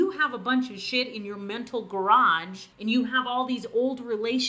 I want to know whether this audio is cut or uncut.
cut